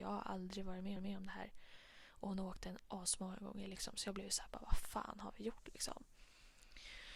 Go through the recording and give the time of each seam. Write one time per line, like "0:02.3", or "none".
0:01.0